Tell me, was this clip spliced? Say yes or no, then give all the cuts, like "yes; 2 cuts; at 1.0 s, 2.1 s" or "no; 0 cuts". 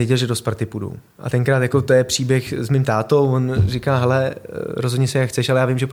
no; 0 cuts